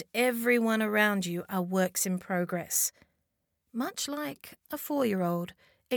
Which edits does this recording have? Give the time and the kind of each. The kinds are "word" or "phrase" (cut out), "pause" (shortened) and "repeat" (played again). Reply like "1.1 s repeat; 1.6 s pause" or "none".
none